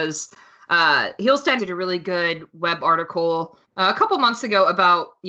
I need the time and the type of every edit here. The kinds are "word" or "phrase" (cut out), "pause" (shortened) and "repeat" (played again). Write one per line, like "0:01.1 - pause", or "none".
0:01.6 - word
0:03.6 - pause